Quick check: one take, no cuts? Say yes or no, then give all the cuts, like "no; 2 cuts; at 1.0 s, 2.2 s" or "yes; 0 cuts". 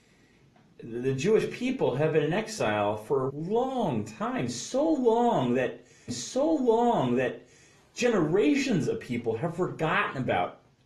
no; 2 cuts; at 3.3 s, 6.1 s